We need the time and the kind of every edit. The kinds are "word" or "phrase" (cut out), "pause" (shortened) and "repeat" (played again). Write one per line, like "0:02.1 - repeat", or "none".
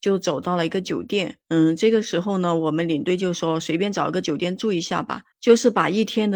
0:01.4 - pause
0:05.3 - pause